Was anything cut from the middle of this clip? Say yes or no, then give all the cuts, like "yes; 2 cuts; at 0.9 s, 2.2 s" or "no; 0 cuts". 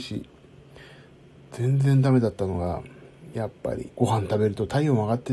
yes; 1 cut; at 3.9 s